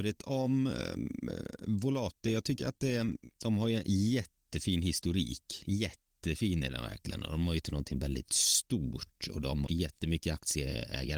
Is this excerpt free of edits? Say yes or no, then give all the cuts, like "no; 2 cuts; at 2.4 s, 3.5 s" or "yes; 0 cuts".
no; 3 cuts; at 3.3 s, 7.6 s, 9.7 s